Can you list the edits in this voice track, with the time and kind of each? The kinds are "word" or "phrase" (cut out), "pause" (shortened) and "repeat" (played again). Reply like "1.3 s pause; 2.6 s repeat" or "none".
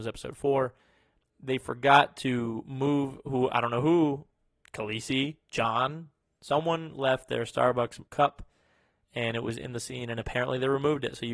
4.5 s pause; 8.1 s pause